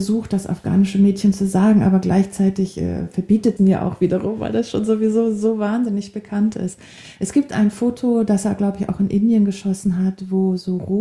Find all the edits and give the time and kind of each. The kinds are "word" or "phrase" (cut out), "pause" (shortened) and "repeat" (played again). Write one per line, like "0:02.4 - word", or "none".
0:03.6 - phrase